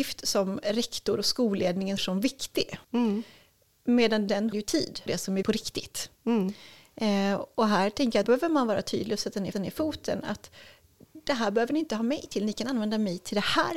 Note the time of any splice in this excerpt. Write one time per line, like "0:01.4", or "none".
0:02.0
0:02.8
0:04.5
0:05.1
0:05.4
0:06.2
0:08.2
0:09.5